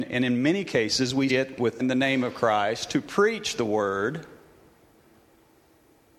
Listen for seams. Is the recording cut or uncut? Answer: cut